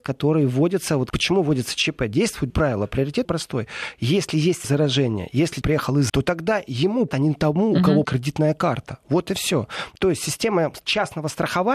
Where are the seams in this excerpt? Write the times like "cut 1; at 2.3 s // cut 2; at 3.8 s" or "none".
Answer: cut 1; at 1.1 s // cut 2; at 2.5 s // cut 3; at 3.2 s // cut 4; at 4.6 s // cut 5; at 5.6 s // cut 6; at 6.1 s // cut 7; at 7.1 s // cut 8; at 8.0 s

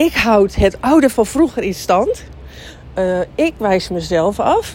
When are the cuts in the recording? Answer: cut 1; at 1.1 s

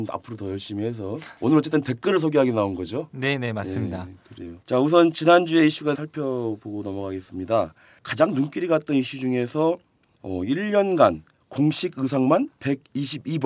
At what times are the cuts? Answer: cut 1; at 1.4 s // cut 2; at 4.6 s // cut 3; at 5.9 s

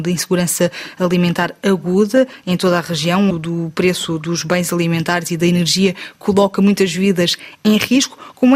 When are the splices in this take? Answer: cut 1; at 3.3 s

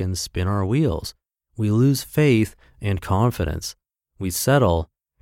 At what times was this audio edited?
none

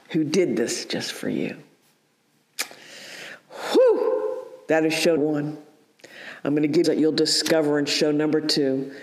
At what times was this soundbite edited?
cut 1; at 5.2 s // cut 2; at 6.8 s

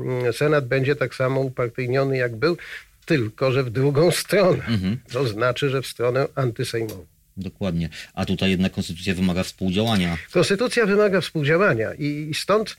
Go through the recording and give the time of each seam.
none

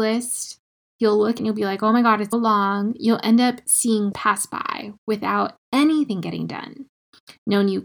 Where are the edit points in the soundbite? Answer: cut 1; at 1.4 s // cut 2; at 2.3 s // cut 3; at 4.1 s

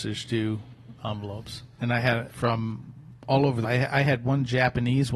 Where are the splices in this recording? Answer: cut 1; at 1.8 s // cut 2; at 2.3 s // cut 3; at 3.6 s

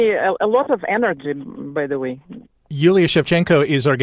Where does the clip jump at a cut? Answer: none

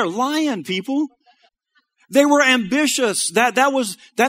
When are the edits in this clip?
cut 1; at 1.5 s

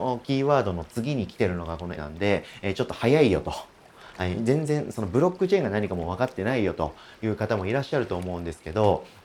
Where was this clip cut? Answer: cut 1; at 2.0 s

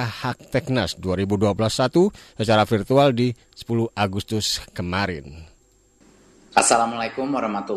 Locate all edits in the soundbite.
none

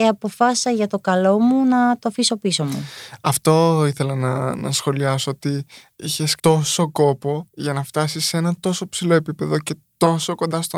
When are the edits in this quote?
cut 1; at 6.4 s // cut 2; at 7.5 s

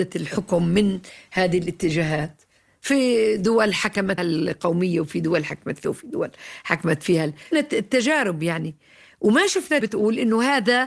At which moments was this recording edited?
cut 1; at 4.2 s // cut 2; at 5.8 s // cut 3; at 7.5 s // cut 4; at 9.8 s

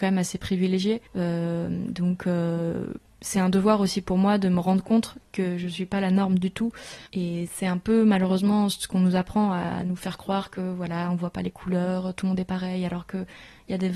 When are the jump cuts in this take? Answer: cut 1; at 1.1 s // cut 2; at 7.1 s

